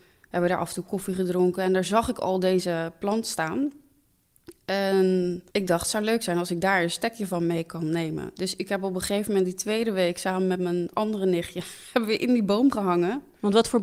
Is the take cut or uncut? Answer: cut